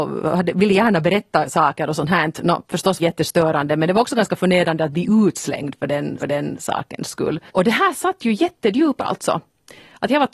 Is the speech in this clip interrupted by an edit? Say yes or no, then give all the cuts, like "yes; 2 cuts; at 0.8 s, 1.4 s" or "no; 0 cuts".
yes; 4 cuts; at 3.0 s, 6.2 s, 7.5 s, 9.0 s